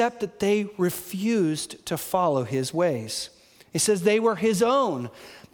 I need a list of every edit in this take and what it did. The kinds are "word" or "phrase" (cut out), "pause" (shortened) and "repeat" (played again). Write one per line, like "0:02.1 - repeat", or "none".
none